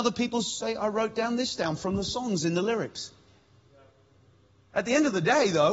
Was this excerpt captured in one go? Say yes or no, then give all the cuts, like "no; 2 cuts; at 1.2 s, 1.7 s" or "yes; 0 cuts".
yes; 0 cuts